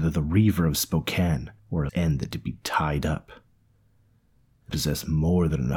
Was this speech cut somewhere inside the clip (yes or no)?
yes